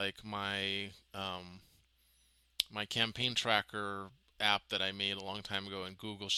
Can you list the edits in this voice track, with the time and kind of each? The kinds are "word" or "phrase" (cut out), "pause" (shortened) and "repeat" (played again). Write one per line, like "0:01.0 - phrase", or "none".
0:04.2 - pause